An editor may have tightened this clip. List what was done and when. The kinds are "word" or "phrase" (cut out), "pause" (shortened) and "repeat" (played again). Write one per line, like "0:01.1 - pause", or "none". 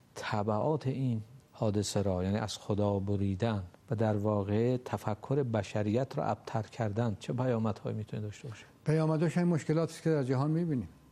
0:01.5 - pause
0:03.8 - pause